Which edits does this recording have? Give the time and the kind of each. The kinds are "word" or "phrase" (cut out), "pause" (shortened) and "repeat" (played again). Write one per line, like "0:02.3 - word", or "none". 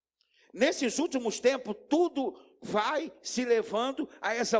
none